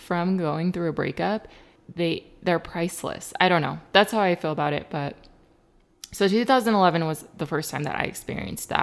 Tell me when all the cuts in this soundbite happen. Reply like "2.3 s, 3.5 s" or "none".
1.8 s